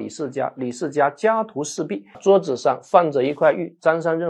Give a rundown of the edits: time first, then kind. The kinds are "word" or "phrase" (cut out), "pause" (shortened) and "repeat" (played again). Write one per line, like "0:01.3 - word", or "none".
0:02.1 - word